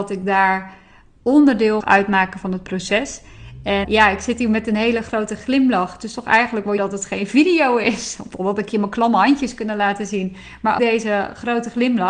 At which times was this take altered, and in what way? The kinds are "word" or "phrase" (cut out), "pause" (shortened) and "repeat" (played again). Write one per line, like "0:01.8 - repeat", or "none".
0:01.8 - word
0:03.8 - word
0:06.8 - word
0:10.8 - word